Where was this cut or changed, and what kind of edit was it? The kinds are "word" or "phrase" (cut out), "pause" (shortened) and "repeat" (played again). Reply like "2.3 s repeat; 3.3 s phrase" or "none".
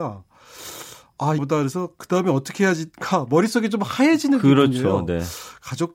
1.4 s phrase